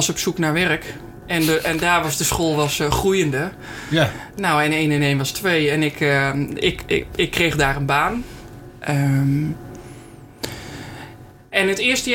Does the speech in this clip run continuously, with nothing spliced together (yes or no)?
yes